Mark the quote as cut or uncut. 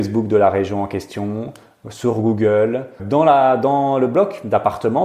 cut